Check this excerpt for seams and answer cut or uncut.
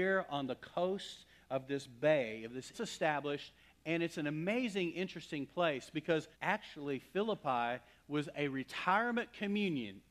cut